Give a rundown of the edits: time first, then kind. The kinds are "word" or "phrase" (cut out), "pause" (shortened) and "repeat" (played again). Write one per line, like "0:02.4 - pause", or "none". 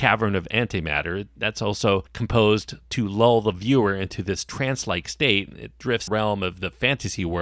0:02.1 - pause
0:06.1 - phrase